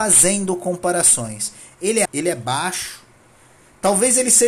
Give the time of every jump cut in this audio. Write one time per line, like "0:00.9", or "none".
0:02.0